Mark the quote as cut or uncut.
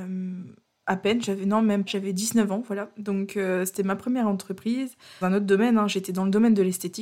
cut